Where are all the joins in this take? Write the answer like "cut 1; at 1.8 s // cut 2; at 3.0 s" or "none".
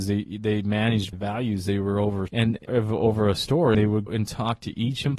cut 1; at 1.1 s // cut 2; at 2.3 s // cut 3; at 2.7 s // cut 4; at 3.7 s // cut 5; at 4.1 s